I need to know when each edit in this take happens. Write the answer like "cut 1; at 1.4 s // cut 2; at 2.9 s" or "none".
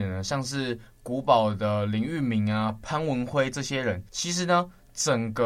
cut 1; at 4.1 s